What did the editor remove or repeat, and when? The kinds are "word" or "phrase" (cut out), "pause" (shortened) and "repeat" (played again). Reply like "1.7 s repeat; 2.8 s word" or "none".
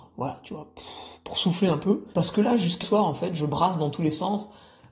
2.1 s pause; 2.8 s word

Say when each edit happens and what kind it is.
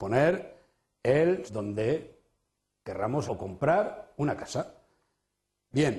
1.5 s word; 3.3 s word

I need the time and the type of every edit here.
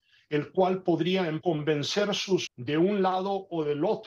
1.4 s word; 2.5 s word

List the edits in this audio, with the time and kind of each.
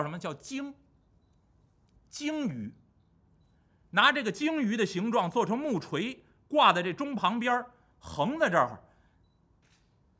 none

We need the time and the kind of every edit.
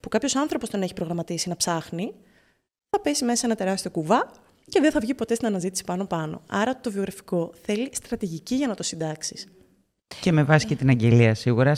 none

